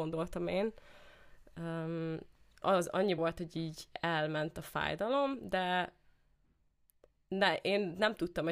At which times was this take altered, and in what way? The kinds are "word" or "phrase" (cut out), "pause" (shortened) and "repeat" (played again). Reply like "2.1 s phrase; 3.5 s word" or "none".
2.6 s word; 3.2 s word